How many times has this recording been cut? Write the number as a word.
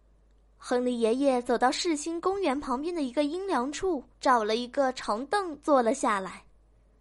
one